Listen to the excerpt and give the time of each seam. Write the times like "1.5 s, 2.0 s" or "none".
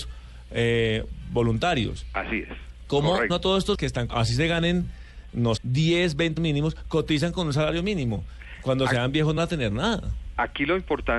3.3 s, 3.7 s, 4.1 s, 5.6 s, 6.4 s, 9.4 s